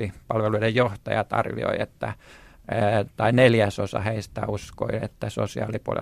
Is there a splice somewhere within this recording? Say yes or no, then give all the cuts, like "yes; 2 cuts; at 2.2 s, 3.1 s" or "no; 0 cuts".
no; 0 cuts